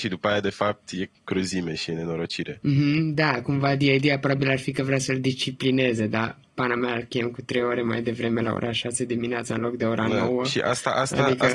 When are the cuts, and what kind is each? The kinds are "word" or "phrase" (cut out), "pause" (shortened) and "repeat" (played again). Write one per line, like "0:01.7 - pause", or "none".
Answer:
0:01.1 - pause